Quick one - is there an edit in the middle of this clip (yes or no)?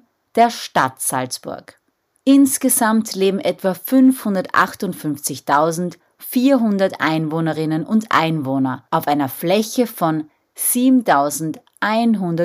no